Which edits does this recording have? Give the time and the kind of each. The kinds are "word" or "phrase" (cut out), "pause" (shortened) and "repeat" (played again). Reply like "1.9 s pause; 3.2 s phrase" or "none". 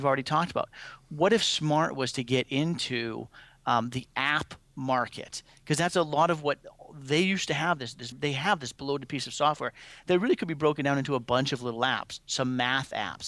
8.1 s word; 8.8 s pause